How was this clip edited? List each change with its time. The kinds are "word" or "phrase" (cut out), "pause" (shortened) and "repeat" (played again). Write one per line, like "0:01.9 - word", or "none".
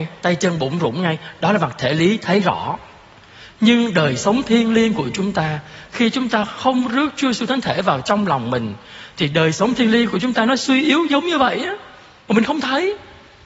none